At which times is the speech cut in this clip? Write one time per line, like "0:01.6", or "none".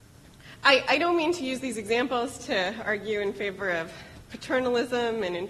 none